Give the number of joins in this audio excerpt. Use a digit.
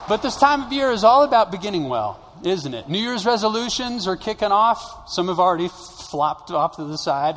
0